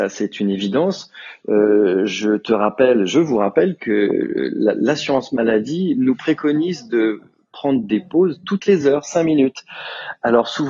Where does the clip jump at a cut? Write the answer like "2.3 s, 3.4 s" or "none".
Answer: none

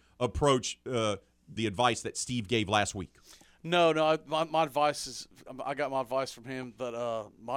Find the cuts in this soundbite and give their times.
1.6 s

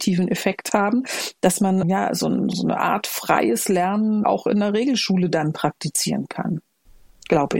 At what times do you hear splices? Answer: 1.8 s, 2.5 s, 4.2 s

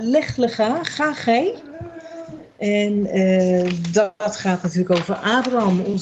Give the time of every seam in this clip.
none

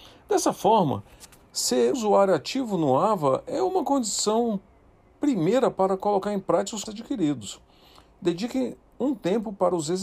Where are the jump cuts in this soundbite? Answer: 1.9 s, 6.9 s

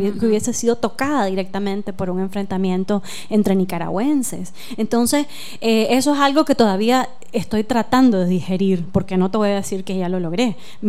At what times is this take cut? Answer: none

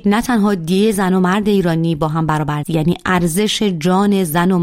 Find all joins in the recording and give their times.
2.6 s

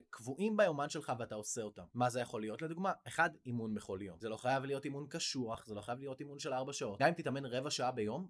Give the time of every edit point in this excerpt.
none

